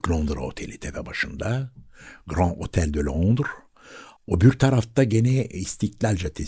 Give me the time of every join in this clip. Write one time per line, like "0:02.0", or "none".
0:04.2